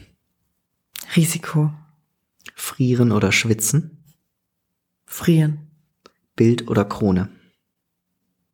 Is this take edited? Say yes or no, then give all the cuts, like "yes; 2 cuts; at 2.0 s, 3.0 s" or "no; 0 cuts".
no; 0 cuts